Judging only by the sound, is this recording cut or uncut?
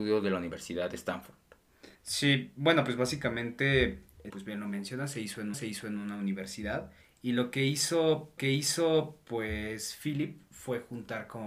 cut